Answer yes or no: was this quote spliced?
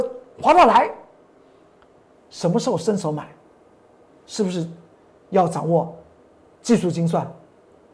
no